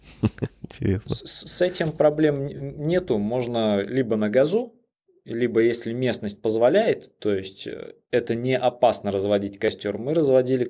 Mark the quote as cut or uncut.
uncut